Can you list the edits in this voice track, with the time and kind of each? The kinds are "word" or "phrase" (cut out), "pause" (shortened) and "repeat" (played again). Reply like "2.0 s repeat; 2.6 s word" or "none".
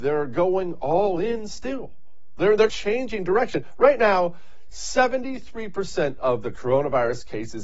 2.7 s word